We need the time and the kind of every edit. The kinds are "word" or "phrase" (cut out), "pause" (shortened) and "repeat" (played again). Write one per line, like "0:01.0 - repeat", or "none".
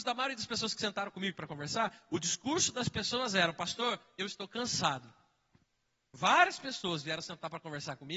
0:05.6 - pause